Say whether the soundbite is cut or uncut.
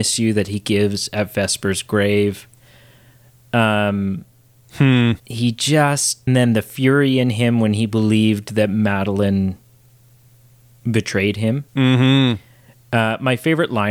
cut